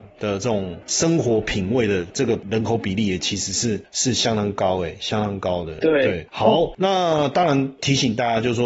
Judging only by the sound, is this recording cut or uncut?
uncut